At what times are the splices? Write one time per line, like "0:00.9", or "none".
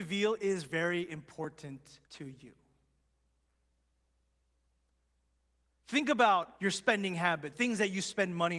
0:02.1
0:06.6
0:07.5